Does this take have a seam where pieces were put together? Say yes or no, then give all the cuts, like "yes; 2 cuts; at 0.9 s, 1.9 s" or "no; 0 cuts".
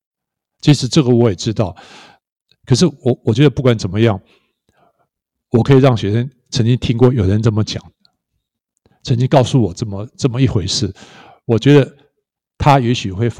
no; 0 cuts